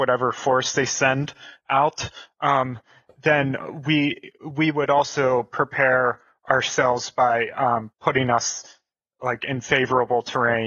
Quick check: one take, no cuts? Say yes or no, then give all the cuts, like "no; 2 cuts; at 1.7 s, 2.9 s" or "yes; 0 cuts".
yes; 0 cuts